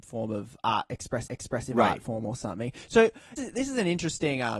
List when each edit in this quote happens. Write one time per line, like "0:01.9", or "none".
0:01.3
0:03.4